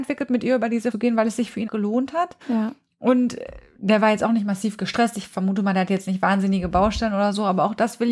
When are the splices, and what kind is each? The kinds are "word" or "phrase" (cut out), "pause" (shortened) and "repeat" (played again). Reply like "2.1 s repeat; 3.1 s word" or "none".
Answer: 0.9 s phrase; 1.7 s word; 2.4 s pause